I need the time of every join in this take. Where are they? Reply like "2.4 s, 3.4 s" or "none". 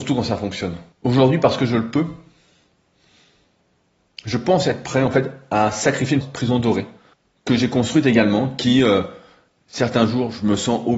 0.9 s, 6.2 s, 7.1 s